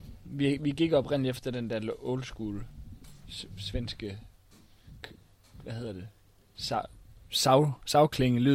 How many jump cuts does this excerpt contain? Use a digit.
0